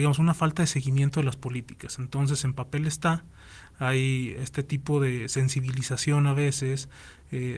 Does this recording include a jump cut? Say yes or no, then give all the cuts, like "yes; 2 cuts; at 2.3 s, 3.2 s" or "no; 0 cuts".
no; 0 cuts